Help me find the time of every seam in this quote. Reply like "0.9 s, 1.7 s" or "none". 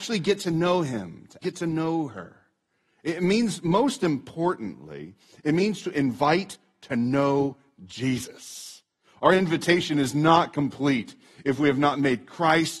1.4 s